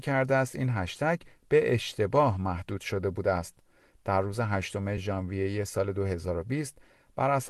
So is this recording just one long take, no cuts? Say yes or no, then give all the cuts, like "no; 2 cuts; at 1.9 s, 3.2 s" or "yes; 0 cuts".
yes; 0 cuts